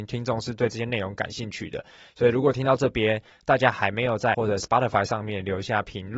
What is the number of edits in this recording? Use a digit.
1